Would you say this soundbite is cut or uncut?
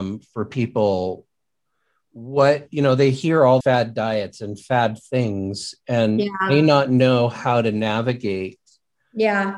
cut